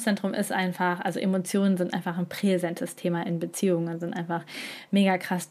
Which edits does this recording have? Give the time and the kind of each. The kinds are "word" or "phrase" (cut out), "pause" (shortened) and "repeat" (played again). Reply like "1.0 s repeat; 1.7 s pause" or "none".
none